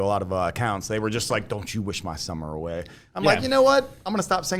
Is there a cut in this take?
no; 0 cuts

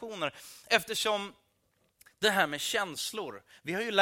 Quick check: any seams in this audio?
no; 0 cuts

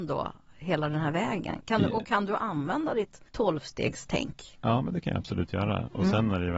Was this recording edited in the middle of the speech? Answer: yes; 1 cut; at 3.3 s

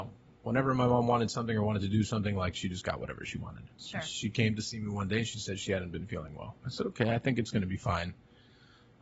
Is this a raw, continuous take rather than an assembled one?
no; 2 cuts; at 3.7 s, 6.6 s

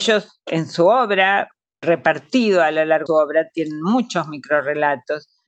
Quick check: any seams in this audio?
yes; 1 cut; at 3.1 s

